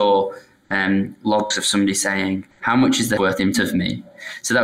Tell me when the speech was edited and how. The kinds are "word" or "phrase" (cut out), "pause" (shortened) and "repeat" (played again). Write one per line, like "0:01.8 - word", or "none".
0:02.5 - pause
0:03.2 - word
0:03.5 - word